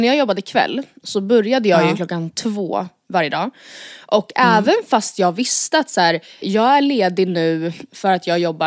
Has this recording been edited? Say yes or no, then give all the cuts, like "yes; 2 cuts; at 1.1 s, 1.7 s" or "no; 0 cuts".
yes; 1 cut; at 6.4 s